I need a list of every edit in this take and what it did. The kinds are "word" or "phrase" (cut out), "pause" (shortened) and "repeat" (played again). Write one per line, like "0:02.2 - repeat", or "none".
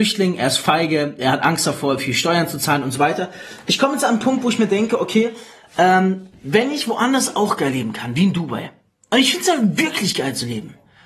none